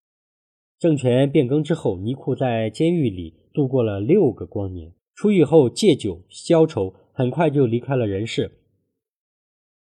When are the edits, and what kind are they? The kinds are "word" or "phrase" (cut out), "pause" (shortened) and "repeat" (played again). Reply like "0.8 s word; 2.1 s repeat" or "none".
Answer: 5.0 s pause